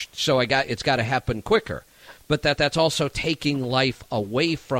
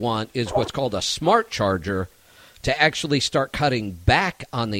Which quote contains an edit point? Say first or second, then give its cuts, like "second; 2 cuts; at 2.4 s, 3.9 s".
first; 1 cut; at 2.6 s